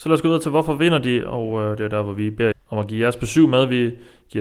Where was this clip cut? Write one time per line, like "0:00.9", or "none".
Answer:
0:02.5